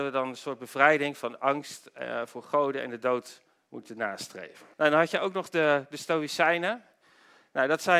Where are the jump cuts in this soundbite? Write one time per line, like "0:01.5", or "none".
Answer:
0:04.7